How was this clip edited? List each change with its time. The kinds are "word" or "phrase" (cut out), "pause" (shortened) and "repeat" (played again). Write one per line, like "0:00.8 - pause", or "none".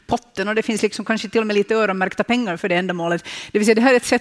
none

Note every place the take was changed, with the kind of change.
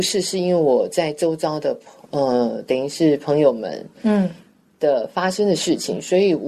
none

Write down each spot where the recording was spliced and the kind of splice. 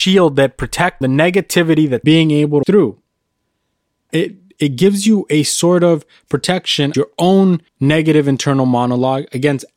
0:01.0 - phrase
0:02.0 - phrase
0:02.6 - phrase
0:04.1 - word
0:06.9 - word
0:07.7 - pause

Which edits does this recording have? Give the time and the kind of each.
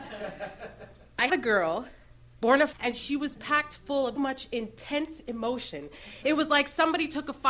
0:01.3 - word
0:02.7 - word
0:04.2 - word

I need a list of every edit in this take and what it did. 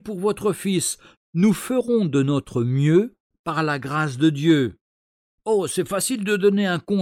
none

